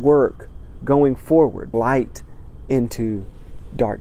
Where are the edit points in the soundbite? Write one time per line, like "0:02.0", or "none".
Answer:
0:01.7